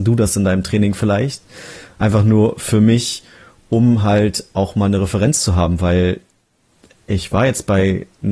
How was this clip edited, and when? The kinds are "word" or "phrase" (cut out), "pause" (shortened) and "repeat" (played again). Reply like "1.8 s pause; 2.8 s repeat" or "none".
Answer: none